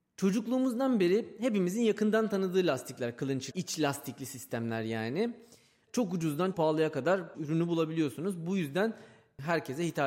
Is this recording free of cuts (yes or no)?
no